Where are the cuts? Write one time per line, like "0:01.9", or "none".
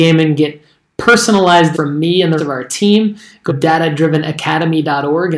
0:01.7
0:02.4
0:03.5